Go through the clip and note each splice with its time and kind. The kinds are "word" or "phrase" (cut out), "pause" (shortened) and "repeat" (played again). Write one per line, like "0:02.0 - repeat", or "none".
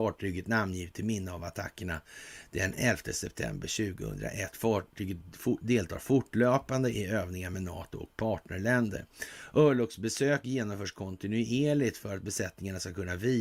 none